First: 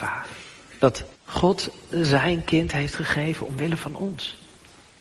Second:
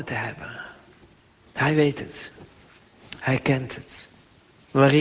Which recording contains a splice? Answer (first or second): first